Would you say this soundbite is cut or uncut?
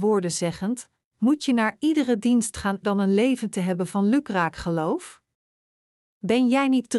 cut